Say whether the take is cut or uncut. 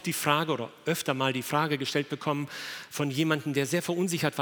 uncut